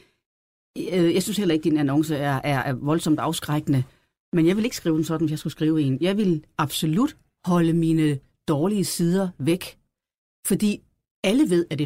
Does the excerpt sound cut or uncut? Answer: uncut